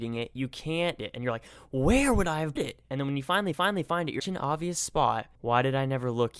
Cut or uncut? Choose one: cut